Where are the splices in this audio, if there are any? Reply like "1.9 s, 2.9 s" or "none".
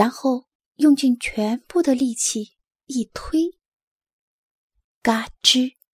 none